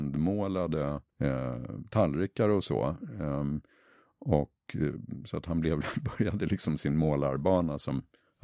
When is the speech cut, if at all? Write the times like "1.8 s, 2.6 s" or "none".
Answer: 1.1 s